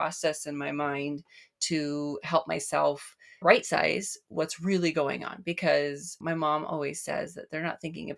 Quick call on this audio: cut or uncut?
cut